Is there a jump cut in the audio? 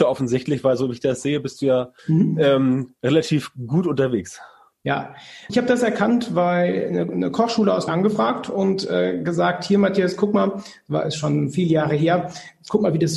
yes; 3 cuts; at 2.0 s, 5.5 s, 7.9 s

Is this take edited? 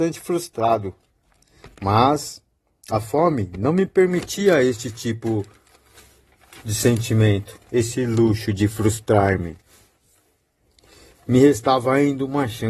no; 0 cuts

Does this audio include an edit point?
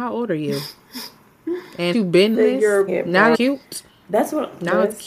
yes; 4 cuts; at 1.9 s, 2.3 s, 2.9 s, 3.3 s

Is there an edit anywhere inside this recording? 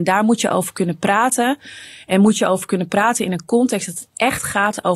no; 0 cuts

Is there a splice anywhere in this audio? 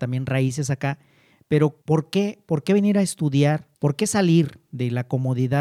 yes; 2 cuts; at 1.8 s, 3.7 s

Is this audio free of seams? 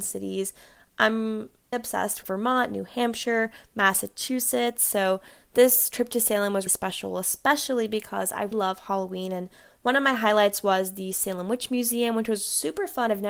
no; 4 cuts; at 1.7 s, 2.2 s, 6.7 s, 8.5 s

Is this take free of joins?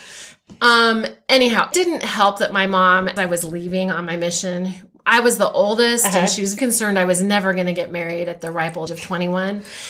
no; 4 cuts; at 1.7 s, 3.2 s, 6.6 s, 8.9 s

